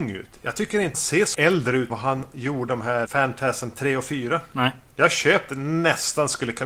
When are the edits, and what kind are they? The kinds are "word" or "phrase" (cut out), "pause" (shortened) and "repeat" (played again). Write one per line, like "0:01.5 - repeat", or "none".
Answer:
0:00.9 - word
0:01.3 - word
0:01.9 - word
0:02.7 - word
0:03.1 - word
0:05.5 - word